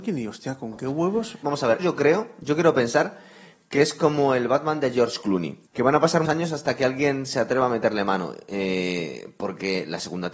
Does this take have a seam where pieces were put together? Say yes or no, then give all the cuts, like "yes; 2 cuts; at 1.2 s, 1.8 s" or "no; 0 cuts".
yes; 3 cuts; at 1.8 s, 5.7 s, 6.3 s